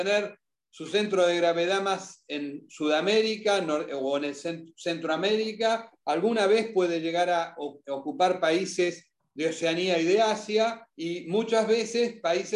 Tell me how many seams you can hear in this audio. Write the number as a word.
one